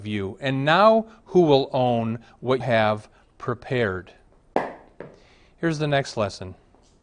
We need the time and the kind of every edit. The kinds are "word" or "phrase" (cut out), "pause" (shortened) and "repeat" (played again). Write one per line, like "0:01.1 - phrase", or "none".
0:02.6 - word